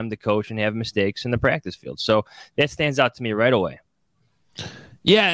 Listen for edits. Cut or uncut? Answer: uncut